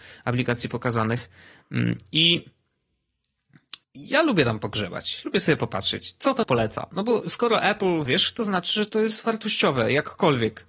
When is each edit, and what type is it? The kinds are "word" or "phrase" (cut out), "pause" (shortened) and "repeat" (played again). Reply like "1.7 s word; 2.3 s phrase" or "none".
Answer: 3.8 s pause; 6.4 s word; 8.1 s phrase